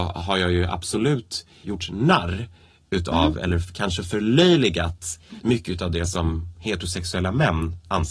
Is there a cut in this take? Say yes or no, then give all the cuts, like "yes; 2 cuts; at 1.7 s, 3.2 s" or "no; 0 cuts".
no; 0 cuts